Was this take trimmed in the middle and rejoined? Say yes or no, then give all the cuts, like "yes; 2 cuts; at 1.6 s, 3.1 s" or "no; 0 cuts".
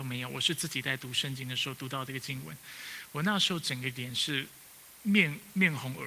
no; 0 cuts